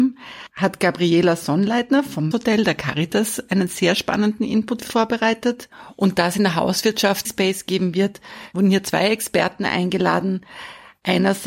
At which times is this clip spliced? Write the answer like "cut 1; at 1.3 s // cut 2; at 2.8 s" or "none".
cut 1; at 2.3 s // cut 2; at 7.2 s